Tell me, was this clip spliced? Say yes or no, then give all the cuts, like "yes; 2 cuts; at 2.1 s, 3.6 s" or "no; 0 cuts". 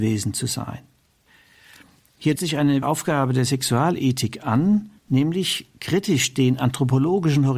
yes; 3 cuts; at 2.4 s, 2.8 s, 5.0 s